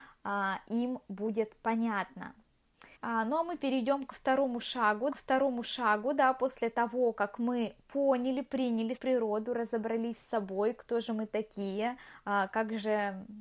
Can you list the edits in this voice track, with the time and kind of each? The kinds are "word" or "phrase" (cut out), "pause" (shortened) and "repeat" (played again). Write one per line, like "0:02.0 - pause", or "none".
0:03.0 - pause
0:05.1 - repeat
0:09.0 - word